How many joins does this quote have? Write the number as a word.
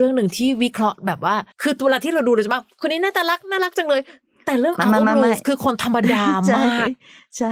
one